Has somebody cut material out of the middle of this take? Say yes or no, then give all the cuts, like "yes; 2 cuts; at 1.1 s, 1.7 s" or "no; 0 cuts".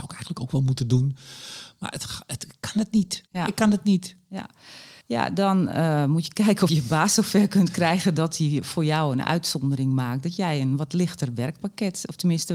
yes; 3 cuts; at 3.3 s, 5.0 s, 6.7 s